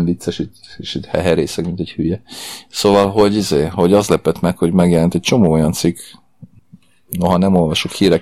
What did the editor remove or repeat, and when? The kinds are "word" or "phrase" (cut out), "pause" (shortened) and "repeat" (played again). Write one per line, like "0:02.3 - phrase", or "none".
none